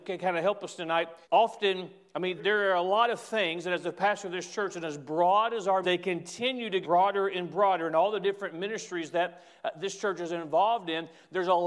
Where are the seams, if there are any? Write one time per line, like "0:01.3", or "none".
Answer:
0:01.2
0:02.4
0:05.8
0:06.8